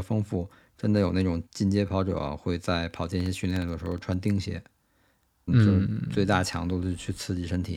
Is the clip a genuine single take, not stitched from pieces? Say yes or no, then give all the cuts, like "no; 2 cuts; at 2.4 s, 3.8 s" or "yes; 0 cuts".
no; 2 cuts; at 1.5 s, 5.5 s